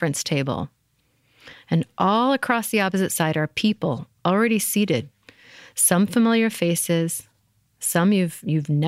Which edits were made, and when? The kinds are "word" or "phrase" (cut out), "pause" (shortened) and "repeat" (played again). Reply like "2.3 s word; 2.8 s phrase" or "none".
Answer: none